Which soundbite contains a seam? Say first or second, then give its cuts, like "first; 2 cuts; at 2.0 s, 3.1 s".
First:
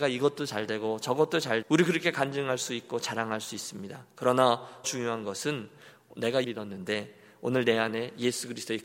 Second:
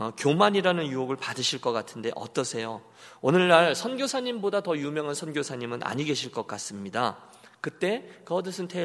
first; 3 cuts; at 1.6 s, 4.8 s, 6.4 s